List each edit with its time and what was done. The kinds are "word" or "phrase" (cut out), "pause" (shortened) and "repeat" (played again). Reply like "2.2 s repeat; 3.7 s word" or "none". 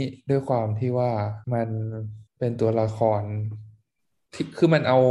1.4 s pause; 2.3 s pause